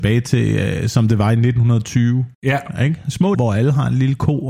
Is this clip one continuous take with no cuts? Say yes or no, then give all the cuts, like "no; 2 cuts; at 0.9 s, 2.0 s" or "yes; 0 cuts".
no; 2 cuts; at 2.3 s, 3.3 s